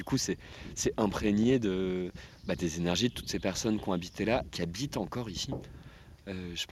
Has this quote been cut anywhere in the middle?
yes; 1 cut; at 4.4 s

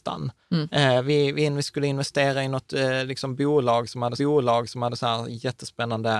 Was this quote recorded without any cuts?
no; 1 cut; at 4.2 s

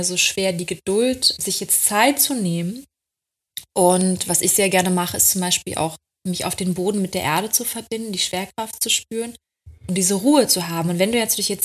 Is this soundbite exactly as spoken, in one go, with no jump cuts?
no; 3 cuts; at 1.4 s, 6.9 s, 9.8 s

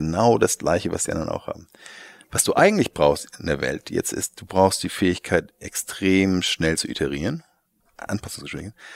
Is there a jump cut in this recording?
yes; 1 cut; at 7.8 s

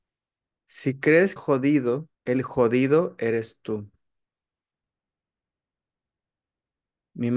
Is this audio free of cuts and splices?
no; 2 cuts; at 1.4 s, 2.1 s

